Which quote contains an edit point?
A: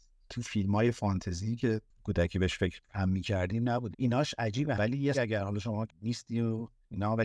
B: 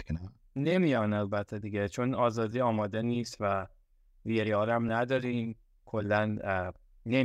A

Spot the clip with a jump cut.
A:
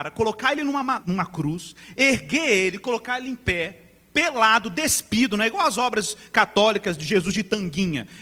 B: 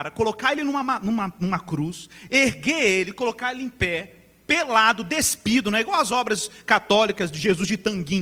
A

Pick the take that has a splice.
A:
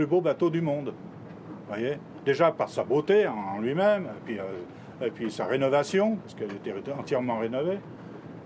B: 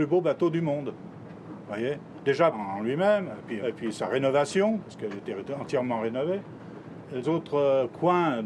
B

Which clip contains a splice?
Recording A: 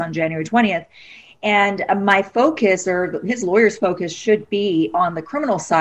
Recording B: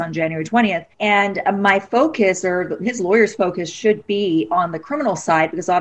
B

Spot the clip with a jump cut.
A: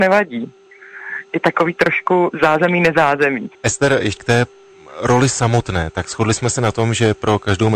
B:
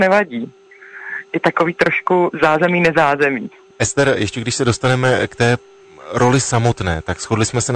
A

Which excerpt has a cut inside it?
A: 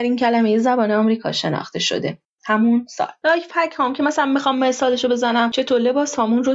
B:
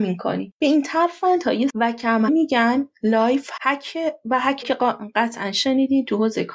B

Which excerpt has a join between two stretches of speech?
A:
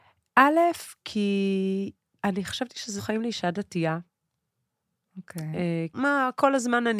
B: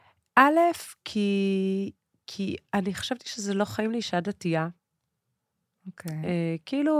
A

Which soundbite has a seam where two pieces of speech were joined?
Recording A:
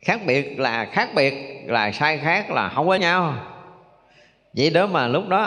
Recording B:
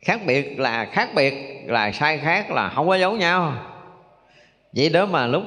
A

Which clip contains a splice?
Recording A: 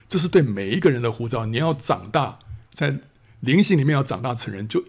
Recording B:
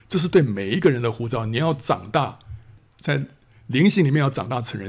A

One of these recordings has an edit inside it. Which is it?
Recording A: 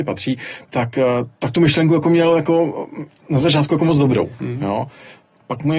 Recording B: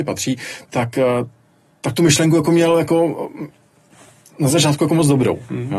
A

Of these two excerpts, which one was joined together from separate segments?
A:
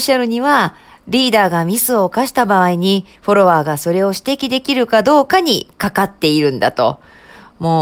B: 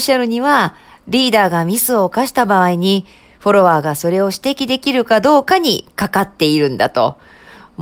A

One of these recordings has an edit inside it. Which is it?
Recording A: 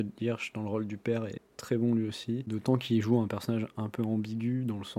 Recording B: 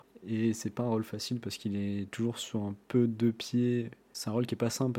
B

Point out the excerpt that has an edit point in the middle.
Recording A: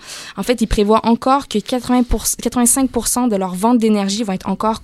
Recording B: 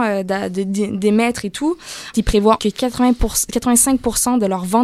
B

